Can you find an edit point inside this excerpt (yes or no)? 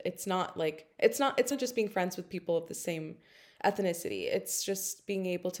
yes